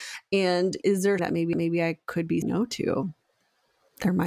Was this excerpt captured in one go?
no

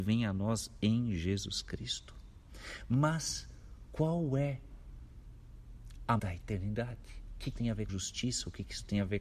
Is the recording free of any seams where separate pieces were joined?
no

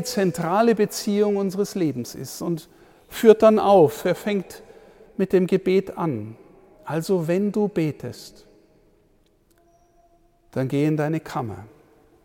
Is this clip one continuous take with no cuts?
yes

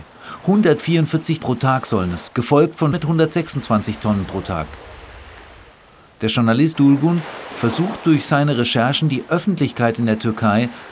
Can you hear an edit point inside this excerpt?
yes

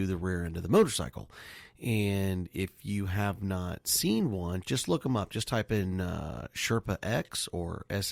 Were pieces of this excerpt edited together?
no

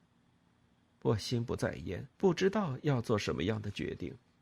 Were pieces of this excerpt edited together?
yes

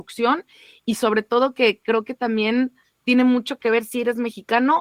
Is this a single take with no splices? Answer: yes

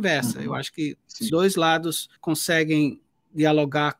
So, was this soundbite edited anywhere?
yes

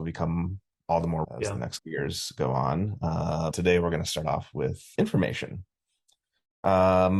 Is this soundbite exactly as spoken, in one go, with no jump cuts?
no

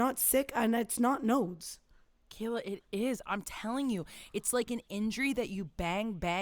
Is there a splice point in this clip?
no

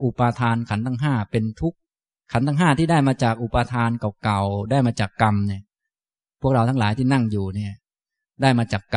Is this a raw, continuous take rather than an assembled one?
yes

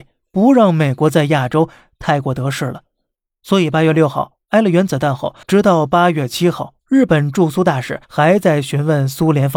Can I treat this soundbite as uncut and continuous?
no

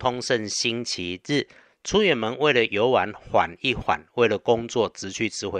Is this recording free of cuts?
yes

